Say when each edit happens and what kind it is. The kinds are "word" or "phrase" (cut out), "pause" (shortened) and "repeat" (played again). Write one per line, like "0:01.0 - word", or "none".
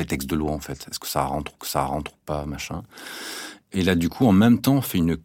0:01.6 - repeat